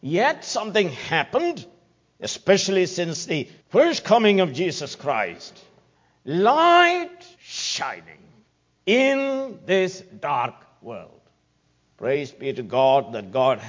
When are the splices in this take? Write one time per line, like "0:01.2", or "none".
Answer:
0:07.3